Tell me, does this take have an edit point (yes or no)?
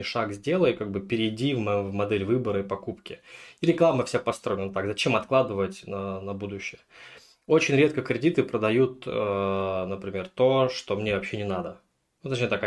no